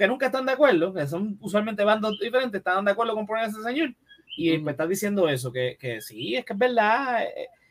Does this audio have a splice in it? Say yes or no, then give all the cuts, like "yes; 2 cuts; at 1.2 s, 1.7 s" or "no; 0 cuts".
no; 0 cuts